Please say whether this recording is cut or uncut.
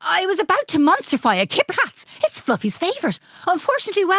cut